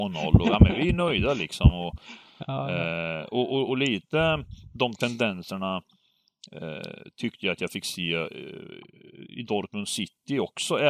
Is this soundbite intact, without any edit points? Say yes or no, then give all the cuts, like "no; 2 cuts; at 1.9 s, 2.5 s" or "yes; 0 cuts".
yes; 0 cuts